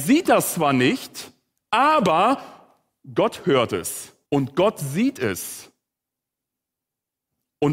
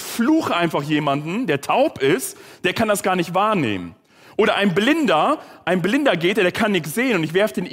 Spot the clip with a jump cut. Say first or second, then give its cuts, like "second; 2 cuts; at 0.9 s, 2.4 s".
first; 1 cut; at 4.3 s